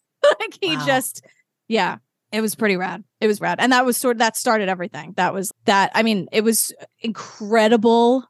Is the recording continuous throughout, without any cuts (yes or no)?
no